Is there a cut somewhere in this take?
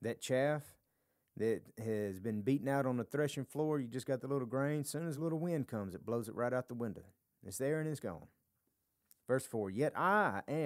no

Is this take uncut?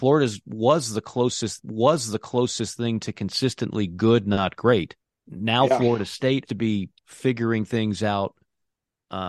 no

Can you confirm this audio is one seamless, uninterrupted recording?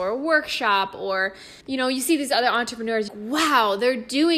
no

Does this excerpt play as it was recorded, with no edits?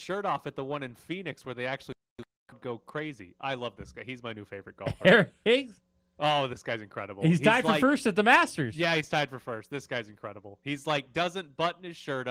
yes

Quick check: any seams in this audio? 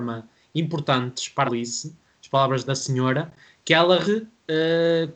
yes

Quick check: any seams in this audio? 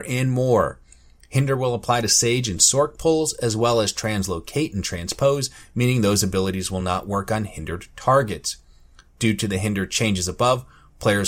no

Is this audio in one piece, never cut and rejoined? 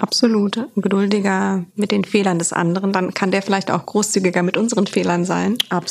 yes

